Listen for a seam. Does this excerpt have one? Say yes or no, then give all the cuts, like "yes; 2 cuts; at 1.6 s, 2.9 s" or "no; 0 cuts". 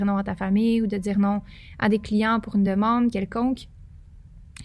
no; 0 cuts